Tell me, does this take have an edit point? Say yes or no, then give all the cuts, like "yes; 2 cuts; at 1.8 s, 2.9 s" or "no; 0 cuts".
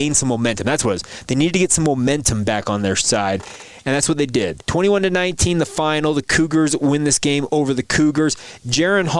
yes; 1 cut; at 4.6 s